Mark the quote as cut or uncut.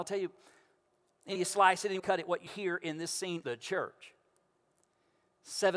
cut